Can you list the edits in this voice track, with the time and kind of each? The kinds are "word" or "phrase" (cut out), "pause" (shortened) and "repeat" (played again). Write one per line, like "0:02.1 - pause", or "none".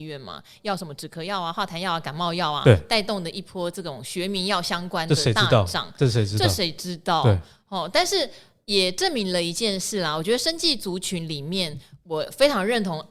none